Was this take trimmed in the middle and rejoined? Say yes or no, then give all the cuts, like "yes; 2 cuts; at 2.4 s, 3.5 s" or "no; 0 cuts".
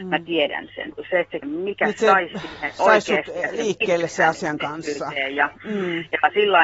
yes; 1 cut; at 1.4 s